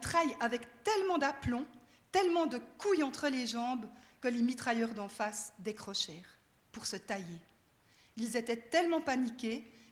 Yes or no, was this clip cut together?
no